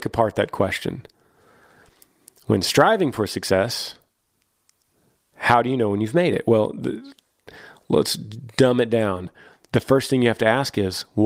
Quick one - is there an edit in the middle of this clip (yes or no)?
no